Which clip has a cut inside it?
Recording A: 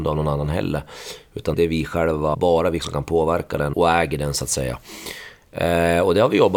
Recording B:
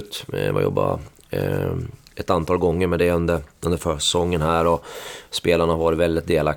A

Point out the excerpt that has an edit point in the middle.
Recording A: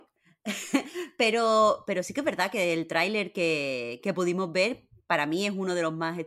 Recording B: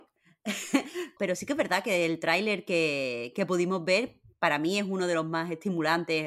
B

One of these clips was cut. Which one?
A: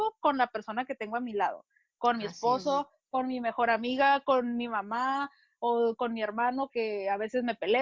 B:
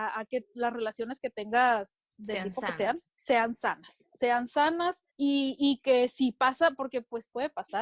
B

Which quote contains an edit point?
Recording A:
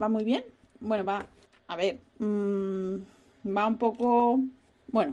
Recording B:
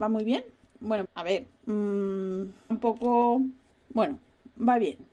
B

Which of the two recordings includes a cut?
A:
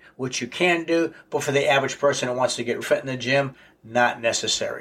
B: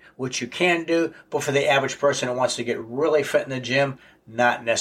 A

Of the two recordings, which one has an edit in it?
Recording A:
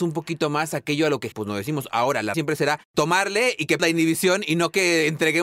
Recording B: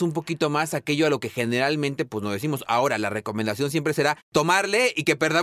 A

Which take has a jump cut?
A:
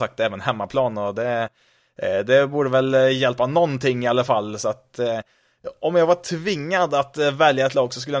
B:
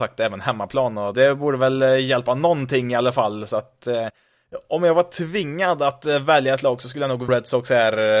B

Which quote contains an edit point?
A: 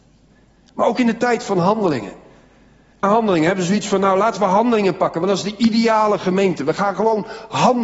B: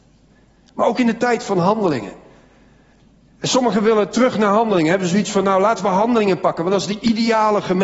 A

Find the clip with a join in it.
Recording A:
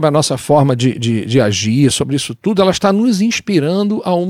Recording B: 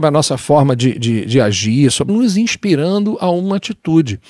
B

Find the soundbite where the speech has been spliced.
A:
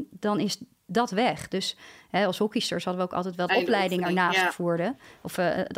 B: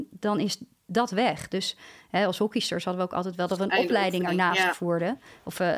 A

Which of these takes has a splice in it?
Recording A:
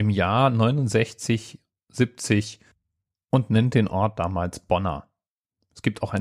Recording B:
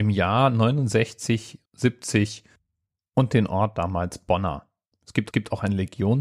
B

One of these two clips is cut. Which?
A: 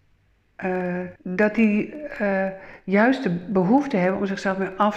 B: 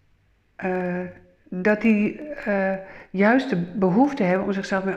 A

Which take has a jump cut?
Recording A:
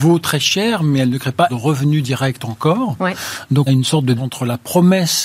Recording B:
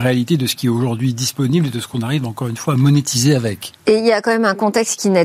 A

